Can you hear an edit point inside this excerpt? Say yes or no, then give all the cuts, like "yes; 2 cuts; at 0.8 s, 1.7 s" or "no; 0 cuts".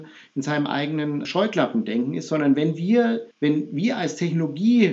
yes; 2 cuts; at 1.2 s, 3.3 s